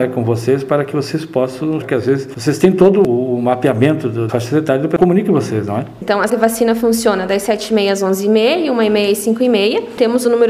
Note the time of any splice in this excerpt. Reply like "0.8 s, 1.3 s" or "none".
1.8 s, 4.3 s, 5.0 s, 6.3 s